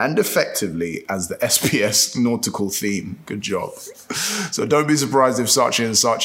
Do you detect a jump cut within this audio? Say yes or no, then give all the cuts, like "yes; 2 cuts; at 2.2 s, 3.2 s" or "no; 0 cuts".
no; 0 cuts